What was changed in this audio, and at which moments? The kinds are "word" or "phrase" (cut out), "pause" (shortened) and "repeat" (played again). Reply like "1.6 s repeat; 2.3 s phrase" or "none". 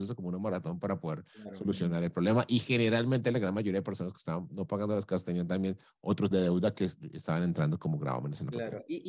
6.3 s word

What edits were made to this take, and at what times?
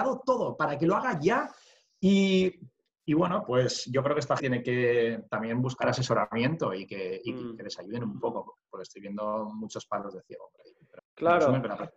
4.4 s word; 11.0 s word

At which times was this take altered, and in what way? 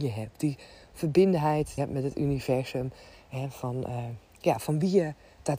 1.8 s phrase

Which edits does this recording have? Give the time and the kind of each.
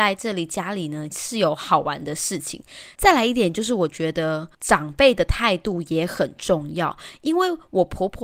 4.5 s pause

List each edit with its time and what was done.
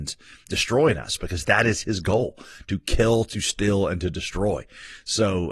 none

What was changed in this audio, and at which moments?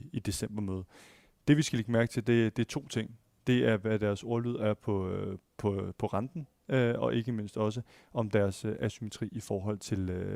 none

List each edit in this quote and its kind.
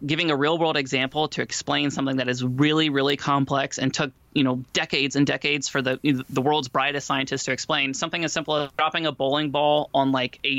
4.7 s pause; 8.7 s pause

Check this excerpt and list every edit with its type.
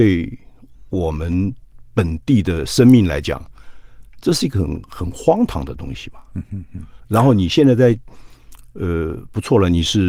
7.0 s pause

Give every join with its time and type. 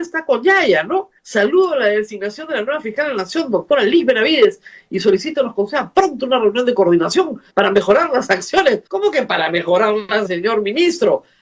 1.2 s pause; 7.5 s pause; 8.9 s pause; 10.2 s word

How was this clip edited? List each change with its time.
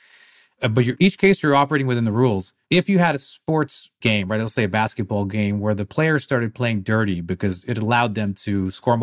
2.6 s pause

